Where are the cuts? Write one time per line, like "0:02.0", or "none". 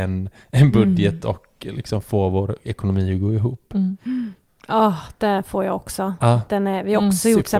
none